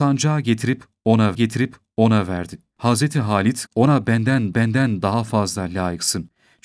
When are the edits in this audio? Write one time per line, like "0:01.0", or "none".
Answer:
0:01.3
0:03.7
0:04.5